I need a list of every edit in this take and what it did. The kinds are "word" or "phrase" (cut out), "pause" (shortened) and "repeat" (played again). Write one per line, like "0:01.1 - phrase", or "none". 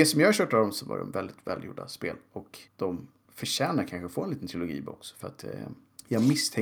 0:02.7 - pause